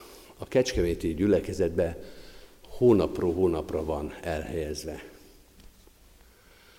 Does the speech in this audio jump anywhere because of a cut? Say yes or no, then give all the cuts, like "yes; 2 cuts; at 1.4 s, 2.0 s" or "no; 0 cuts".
no; 0 cuts